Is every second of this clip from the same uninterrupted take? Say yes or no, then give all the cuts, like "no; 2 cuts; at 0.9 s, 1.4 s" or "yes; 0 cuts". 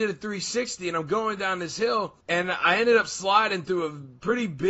no; 1 cut; at 2.2 s